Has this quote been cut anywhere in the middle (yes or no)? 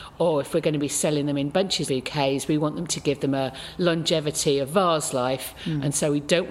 yes